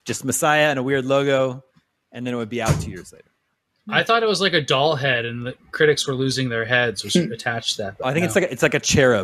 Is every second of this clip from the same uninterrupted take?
yes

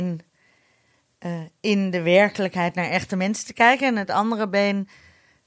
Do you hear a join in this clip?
no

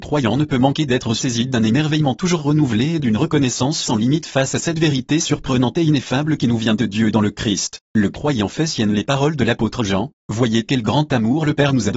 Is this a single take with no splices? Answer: yes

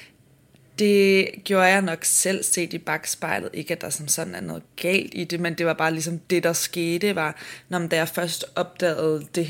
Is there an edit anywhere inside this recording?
yes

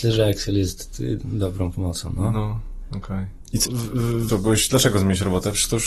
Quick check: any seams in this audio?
yes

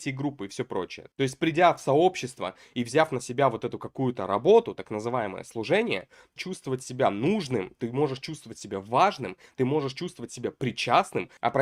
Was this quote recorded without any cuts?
no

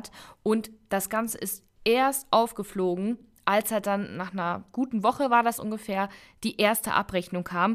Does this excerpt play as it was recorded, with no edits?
yes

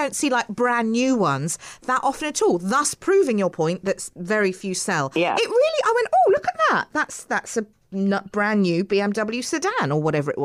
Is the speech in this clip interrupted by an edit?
no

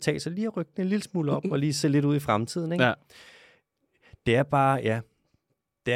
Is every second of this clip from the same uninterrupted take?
yes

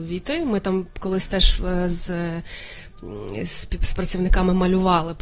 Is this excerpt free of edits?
yes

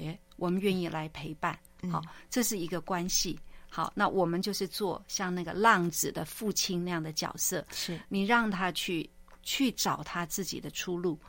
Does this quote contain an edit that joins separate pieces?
no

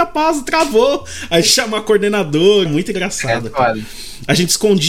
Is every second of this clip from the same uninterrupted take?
no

